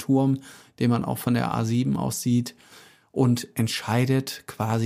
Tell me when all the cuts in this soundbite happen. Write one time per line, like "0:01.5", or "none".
none